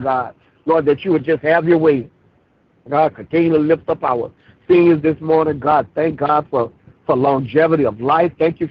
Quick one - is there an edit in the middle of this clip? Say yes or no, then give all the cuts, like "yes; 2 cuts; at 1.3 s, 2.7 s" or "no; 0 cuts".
no; 0 cuts